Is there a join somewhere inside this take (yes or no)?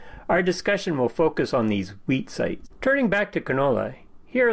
no